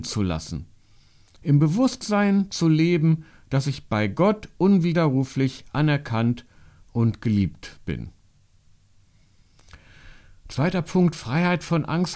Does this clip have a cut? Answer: no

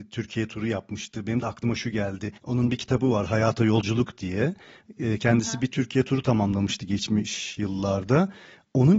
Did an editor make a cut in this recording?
yes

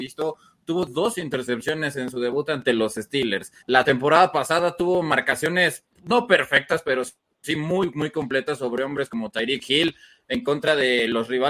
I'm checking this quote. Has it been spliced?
yes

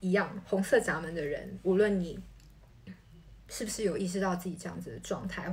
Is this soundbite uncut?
no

